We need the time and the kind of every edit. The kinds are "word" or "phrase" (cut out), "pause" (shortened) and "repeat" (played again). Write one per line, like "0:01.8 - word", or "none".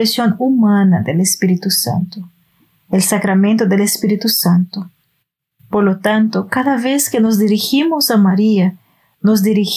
none

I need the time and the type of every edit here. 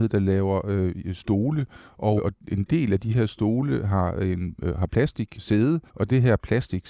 0:02.2 - word
0:05.4 - word
0:05.9 - pause

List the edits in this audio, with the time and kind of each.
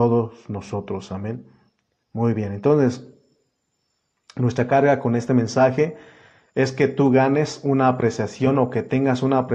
none

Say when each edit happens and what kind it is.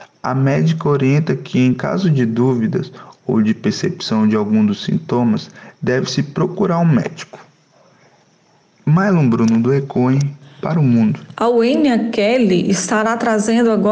none

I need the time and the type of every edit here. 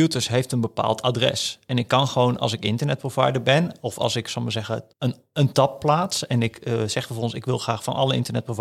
0:04.9 - pause

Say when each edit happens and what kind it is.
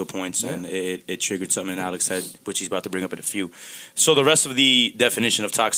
0:02.4 - pause

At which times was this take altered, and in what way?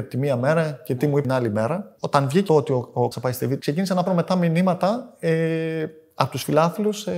0:01.2 - word
0:02.5 - word
0:03.1 - word
0:03.6 - word
0:04.1 - word

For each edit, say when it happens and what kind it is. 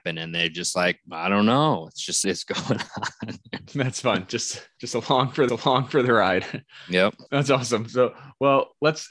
0:02.2 - phrase
0:03.7 - pause
0:05.5 - repeat
0:07.3 - pause

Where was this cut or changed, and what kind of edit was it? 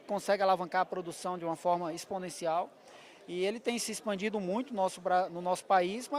none

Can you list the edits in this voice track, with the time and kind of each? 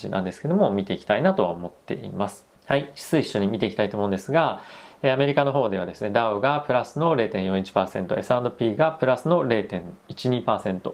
0:02.6 - pause

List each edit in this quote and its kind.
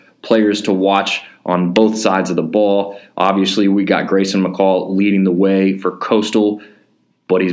none

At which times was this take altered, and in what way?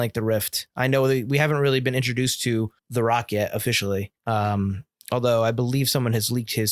0:02.8 - pause
0:04.2 - pause

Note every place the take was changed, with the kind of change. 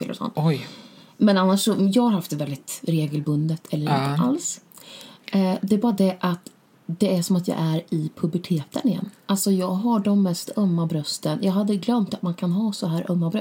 0:06.7 - pause

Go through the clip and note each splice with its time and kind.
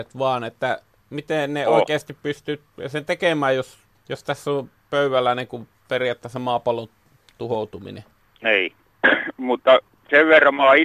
none

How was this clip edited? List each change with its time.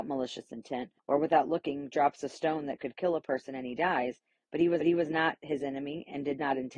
0:01.0 - pause
0:04.8 - repeat

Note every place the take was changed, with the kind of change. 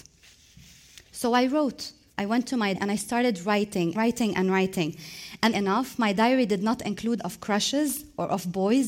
0:02.1 - pause
0:02.7 - word
0:03.9 - word
0:05.5 - word
0:07.2 - word

